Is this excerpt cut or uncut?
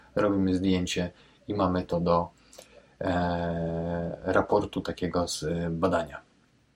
uncut